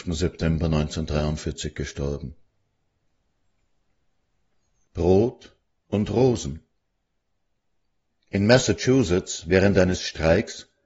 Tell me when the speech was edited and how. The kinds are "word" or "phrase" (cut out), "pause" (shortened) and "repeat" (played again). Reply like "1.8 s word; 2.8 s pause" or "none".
5.6 s pause

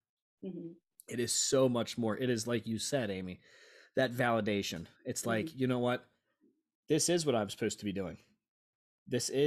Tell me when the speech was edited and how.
4.9 s pause

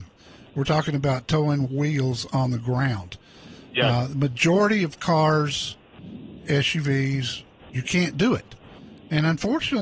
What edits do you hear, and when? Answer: 1.6 s phrase

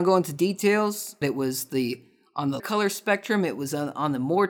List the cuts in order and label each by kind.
1.2 s word; 2.6 s word

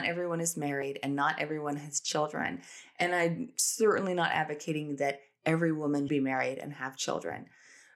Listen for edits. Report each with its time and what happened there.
6.1 s word

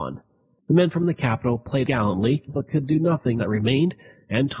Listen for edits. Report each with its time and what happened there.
1.9 s word; 2.5 s word; 3.4 s phrase

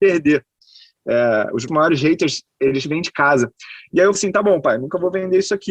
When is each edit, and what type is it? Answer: 1.7 s word; 2.8 s word; 4.1 s word

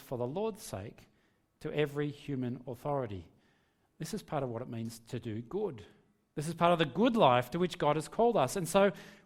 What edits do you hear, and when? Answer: none

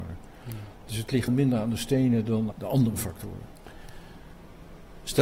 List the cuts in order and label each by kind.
1.3 s word; 2.5 s word

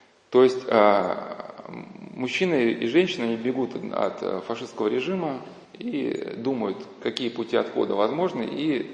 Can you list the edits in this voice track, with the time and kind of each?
5.6 s pause

